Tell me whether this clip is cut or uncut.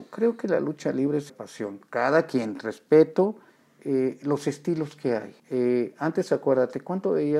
cut